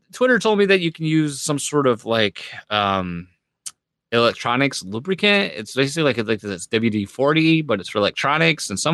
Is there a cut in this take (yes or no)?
no